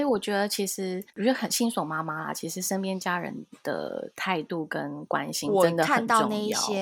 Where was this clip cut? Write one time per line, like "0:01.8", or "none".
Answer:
0:01.1